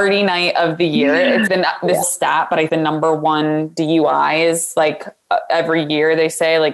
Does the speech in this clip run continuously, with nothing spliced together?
no; 3 cuts; at 1.5 s, 2.0 s, 2.7 s

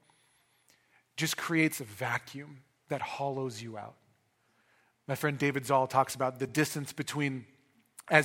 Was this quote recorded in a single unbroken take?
yes; 0 cuts

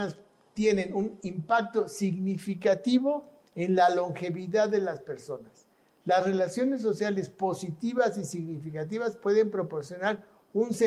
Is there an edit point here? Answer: no; 0 cuts

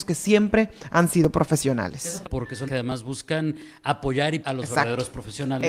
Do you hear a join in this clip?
yes; 3 cuts; at 2.2 s, 2.7 s, 4.4 s

